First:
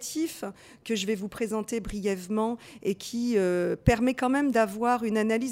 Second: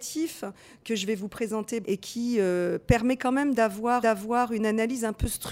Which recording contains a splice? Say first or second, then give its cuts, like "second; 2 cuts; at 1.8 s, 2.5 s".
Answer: second; 2 cuts; at 1.8 s, 4.0 s